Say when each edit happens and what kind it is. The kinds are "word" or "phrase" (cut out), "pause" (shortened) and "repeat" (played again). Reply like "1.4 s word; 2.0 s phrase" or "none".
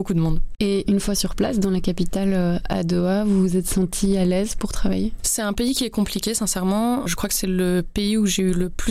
none